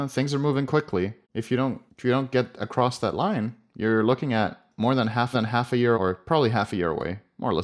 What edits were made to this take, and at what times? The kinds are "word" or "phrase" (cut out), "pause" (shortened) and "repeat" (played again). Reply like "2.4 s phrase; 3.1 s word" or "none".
1.2 s pause; 1.9 s pause; 5.3 s repeat; 5.9 s word